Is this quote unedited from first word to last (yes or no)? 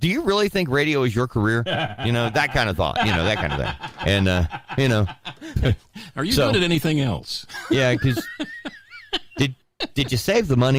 yes